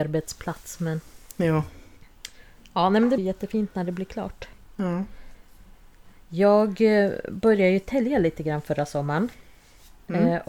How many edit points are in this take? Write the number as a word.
two